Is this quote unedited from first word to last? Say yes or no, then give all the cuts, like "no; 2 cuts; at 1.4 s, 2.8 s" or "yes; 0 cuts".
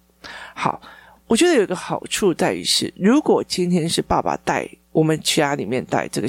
yes; 0 cuts